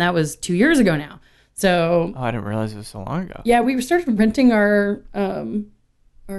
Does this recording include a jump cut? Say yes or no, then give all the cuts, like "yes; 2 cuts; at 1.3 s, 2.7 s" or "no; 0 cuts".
no; 0 cuts